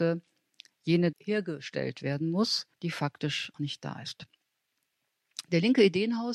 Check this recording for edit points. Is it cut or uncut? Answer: cut